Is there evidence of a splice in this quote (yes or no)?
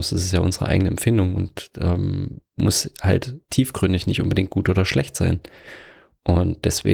yes